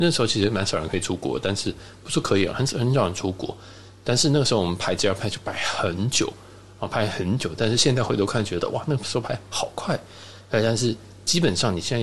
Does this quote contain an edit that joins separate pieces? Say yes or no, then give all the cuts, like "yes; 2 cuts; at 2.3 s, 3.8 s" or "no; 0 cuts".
no; 0 cuts